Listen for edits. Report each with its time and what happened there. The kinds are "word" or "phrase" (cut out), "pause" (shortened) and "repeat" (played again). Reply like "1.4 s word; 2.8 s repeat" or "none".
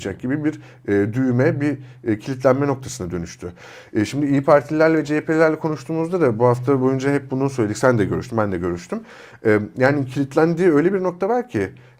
none